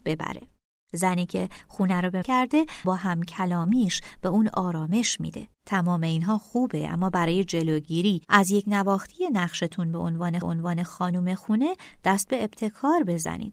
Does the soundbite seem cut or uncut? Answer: cut